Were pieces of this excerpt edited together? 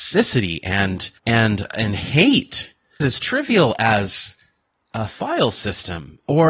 yes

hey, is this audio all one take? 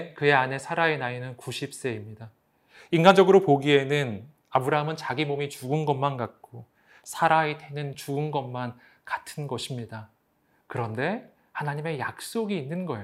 yes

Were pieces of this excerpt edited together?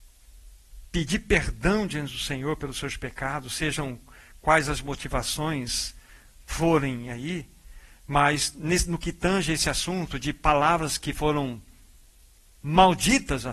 no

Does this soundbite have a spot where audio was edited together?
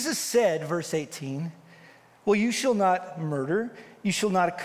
no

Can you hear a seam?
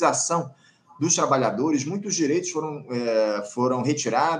no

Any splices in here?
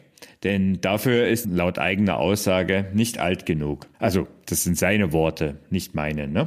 yes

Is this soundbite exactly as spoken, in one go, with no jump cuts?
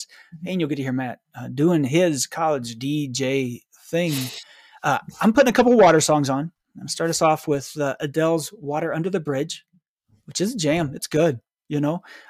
yes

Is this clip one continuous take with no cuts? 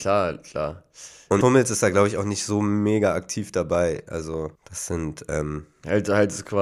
no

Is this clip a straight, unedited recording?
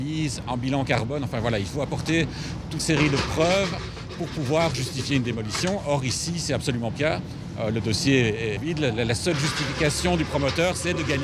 no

